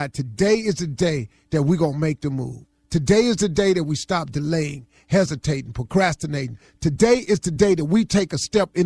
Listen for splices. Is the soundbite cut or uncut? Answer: uncut